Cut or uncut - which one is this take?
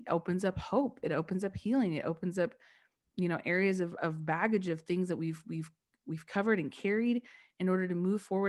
uncut